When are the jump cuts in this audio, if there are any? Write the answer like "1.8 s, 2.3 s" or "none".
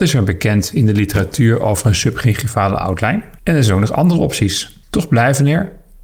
3.4 s, 4.8 s